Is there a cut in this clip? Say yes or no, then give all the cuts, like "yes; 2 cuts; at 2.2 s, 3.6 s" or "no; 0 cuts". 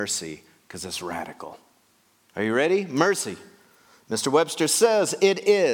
no; 0 cuts